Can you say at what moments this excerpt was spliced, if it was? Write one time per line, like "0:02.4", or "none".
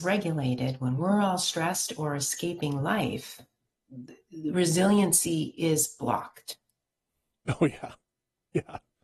none